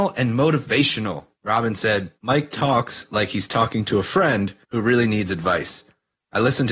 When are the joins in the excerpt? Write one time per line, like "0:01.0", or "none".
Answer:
0:01.3
0:02.2
0:04.6

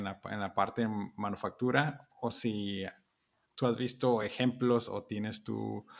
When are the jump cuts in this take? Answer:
none

